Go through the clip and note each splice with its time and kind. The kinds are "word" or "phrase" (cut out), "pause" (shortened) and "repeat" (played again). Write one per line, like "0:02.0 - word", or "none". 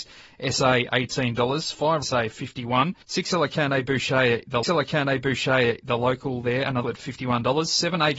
0:02.0 - phrase
0:03.0 - pause
0:04.6 - repeat
0:06.8 - word